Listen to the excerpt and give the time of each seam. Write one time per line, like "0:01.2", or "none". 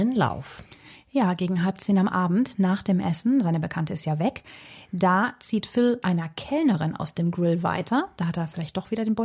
0:06.0